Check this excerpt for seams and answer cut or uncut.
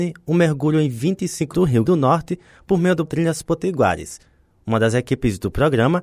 cut